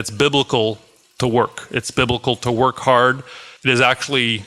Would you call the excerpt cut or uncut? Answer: cut